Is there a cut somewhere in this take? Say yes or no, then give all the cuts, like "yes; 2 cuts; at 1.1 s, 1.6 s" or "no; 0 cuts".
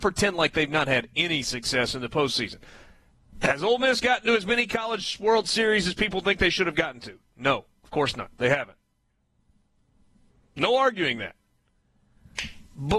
no; 0 cuts